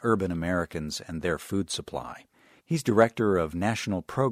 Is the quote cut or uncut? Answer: uncut